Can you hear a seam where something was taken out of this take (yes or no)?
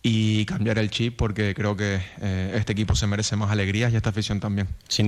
no